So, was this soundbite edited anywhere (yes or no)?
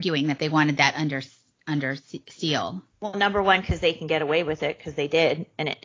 no